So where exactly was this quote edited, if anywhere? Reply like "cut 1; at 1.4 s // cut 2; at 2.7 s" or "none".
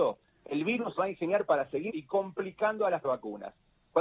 cut 1; at 1.0 s // cut 2; at 1.9 s // cut 3; at 3.0 s